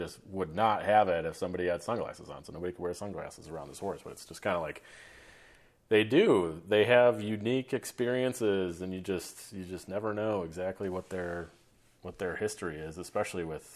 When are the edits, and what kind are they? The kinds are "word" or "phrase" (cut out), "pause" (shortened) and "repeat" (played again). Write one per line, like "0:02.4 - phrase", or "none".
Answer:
none